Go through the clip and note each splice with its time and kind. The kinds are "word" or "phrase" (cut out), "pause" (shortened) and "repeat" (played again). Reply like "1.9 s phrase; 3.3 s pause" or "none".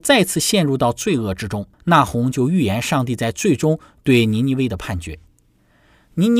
1.7 s pause